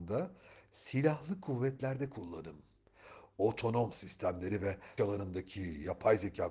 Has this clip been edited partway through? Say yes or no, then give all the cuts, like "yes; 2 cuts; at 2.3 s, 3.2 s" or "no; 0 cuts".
yes; 2 cuts; at 3.9 s, 5.0 s